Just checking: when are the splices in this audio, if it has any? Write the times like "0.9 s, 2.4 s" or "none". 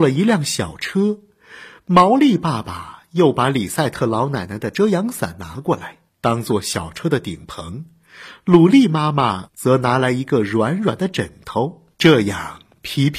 11.9 s